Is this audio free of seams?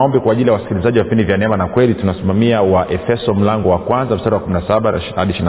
yes; 0 cuts

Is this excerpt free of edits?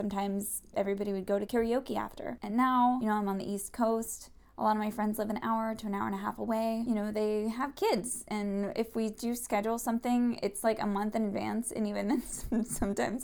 yes; 0 cuts

